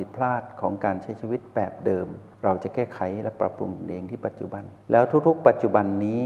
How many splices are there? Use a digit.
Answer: 2